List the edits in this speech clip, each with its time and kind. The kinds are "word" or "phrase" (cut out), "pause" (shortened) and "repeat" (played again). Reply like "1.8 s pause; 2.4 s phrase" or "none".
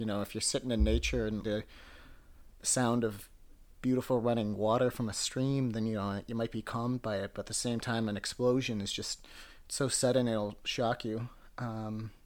1.4 s word